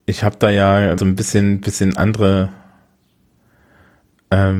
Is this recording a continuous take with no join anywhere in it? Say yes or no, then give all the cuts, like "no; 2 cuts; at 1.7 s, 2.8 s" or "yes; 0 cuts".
no; 1 cut; at 1.0 s